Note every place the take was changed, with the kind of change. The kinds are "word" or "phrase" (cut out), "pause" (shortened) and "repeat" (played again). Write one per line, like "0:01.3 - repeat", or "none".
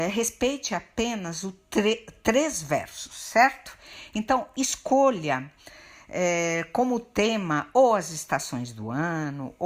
none